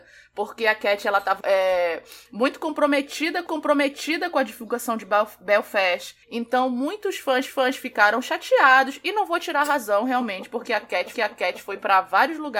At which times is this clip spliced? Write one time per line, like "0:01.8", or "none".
0:01.4
0:03.5
0:06.2
0:07.5
0:11.1